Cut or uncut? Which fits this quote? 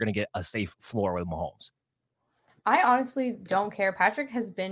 uncut